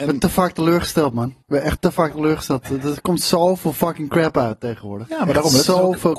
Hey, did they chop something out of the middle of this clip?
yes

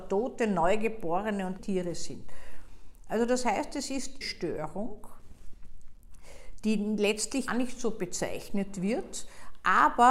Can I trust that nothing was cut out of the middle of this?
no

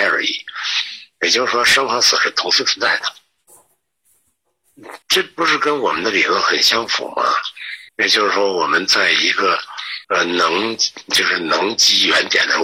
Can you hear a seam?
yes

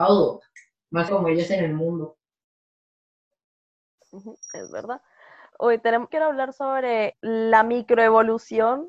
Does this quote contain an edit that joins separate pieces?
yes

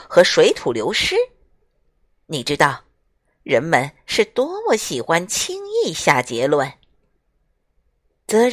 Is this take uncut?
yes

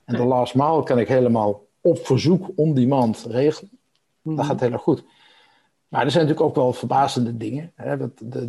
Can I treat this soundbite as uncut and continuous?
yes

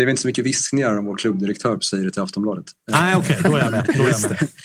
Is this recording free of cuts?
yes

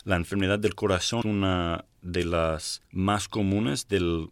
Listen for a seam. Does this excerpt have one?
yes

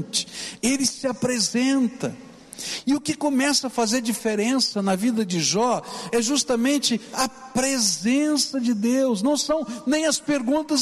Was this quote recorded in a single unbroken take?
yes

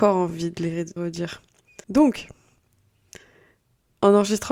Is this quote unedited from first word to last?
no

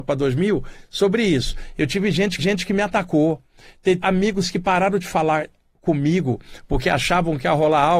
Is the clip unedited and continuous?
no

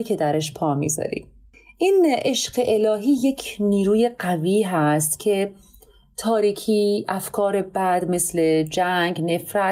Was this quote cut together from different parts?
no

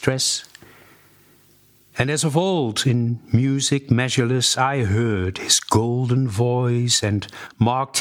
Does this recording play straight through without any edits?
yes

